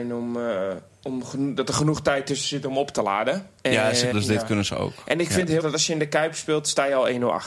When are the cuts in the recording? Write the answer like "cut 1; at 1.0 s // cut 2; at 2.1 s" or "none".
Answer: cut 1; at 4.1 s // cut 2; at 5.6 s